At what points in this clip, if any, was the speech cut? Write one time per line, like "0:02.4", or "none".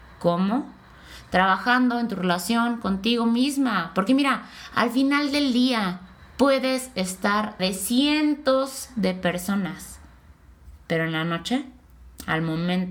0:07.6

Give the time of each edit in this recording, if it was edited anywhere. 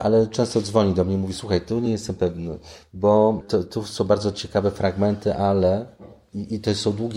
none

